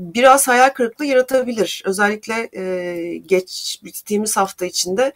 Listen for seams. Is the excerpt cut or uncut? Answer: uncut